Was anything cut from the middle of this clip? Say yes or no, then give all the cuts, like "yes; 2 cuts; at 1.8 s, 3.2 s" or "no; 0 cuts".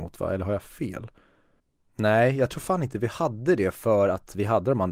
no; 0 cuts